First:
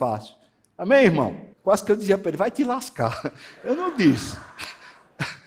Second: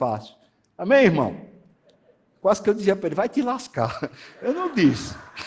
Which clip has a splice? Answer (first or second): first